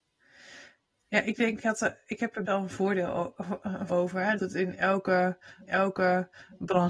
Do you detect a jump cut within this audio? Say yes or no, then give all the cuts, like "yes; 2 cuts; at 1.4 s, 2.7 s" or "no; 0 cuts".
yes; 5 cuts; at 1.6 s, 2.5 s, 3.9 s, 4.4 s, 5.7 s